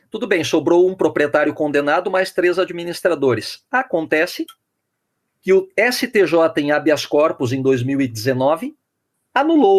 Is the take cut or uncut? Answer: uncut